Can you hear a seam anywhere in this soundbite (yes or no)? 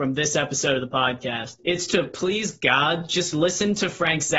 no